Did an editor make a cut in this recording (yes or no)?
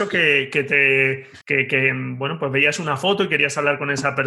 yes